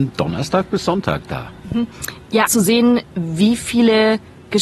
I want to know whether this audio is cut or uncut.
cut